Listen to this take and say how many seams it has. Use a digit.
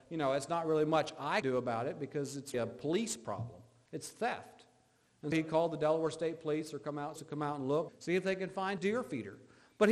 6